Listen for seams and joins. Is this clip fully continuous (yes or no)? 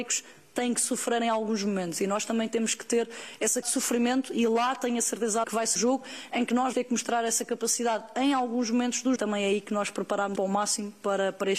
no